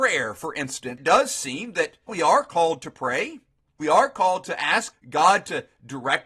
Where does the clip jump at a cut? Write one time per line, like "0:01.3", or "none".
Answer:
0:01.0
0:02.1
0:03.8
0:04.9